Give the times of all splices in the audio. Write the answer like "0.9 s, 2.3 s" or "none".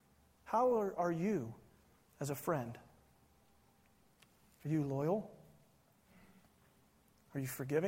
none